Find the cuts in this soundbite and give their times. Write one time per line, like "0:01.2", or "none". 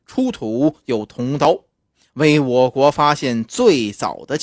none